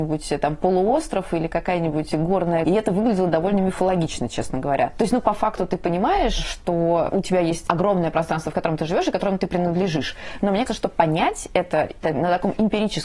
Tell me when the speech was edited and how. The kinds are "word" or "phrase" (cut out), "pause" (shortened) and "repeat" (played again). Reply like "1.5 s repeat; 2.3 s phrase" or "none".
2.6 s word; 10.7 s word

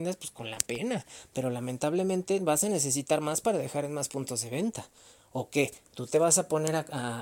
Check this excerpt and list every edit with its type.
none

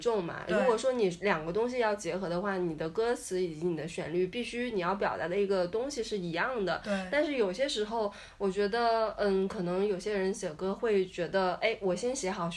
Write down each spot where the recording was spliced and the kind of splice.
none

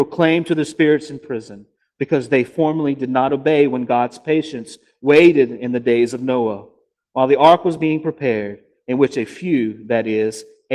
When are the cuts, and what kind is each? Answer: none

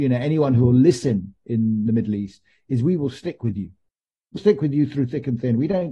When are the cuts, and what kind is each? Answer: 4.4 s word

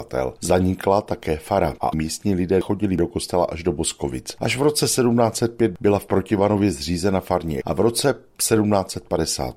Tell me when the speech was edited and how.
7.6 s word

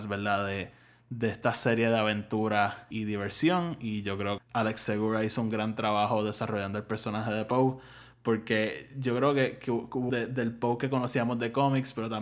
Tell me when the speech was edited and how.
2.9 s word; 4.4 s word; 10.1 s word

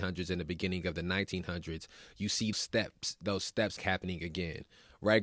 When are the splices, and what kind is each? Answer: 2.5 s word; 3.8 s word

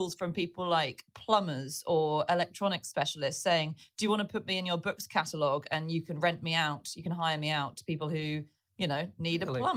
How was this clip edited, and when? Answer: none

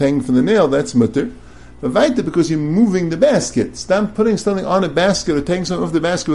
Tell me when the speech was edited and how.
none

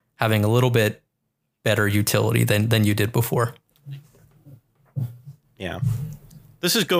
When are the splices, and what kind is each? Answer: none

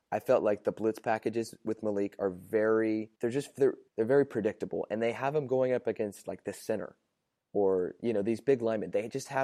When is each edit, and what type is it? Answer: 3.2 s pause; 3.9 s pause

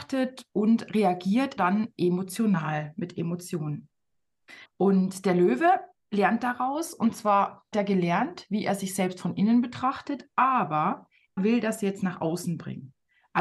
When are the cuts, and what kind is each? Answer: 1.6 s word; 4.6 s pause; 7.7 s word; 11.4 s word

